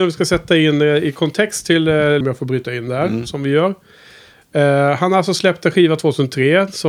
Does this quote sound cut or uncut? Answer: cut